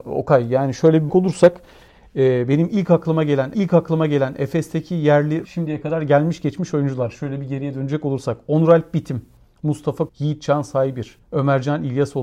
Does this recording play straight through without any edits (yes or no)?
no